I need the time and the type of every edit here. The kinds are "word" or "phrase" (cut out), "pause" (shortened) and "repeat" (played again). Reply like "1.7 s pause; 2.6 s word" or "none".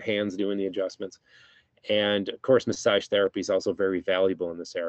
none